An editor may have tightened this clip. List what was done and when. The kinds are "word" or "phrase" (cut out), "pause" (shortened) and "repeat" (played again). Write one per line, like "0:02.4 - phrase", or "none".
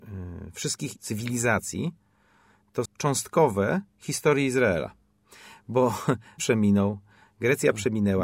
0:01.0 - word
0:02.8 - word
0:06.4 - word

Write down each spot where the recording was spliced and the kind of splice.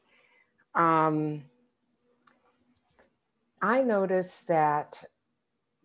0:03.6 - word

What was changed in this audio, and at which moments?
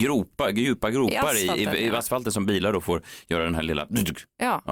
none

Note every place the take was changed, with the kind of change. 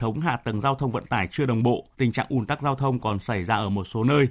0:01.9 - pause

